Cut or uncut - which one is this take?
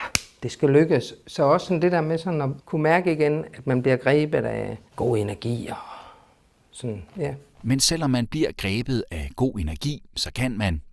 uncut